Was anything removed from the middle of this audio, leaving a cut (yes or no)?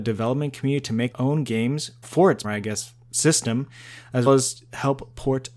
yes